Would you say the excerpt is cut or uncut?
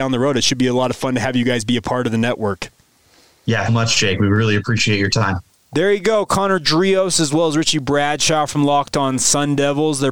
cut